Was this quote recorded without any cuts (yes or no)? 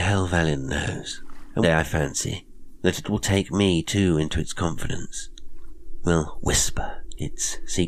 no